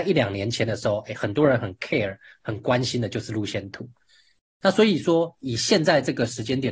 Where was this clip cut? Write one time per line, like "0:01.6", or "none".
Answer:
none